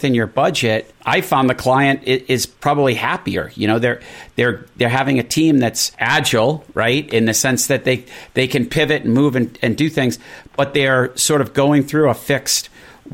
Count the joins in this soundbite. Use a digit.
1